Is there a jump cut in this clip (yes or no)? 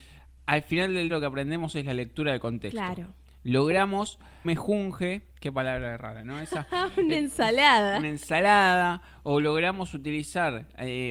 yes